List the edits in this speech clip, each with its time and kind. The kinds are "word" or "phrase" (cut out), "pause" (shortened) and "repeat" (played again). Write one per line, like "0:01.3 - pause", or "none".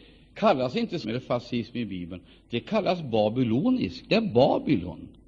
0:01.0 - word